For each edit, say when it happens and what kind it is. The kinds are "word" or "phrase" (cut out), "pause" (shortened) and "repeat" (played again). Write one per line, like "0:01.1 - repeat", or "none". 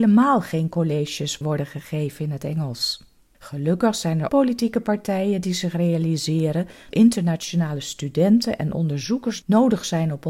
0:01.4 - word
0:03.2 - pause
0:04.3 - word
0:06.9 - word